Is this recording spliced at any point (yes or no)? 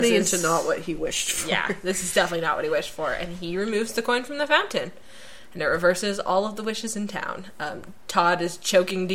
no